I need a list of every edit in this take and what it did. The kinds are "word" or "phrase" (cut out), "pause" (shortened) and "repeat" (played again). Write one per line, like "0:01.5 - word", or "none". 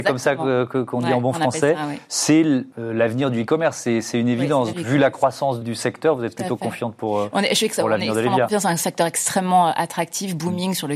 0:02.7 - pause
0:04.7 - word
0:05.6 - word